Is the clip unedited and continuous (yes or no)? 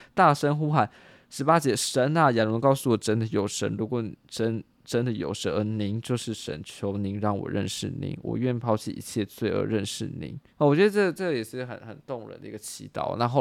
no